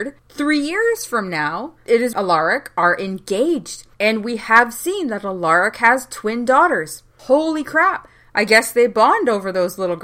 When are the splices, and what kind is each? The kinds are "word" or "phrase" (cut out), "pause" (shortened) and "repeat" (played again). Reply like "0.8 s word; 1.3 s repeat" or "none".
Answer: 2.1 s phrase; 3.9 s pause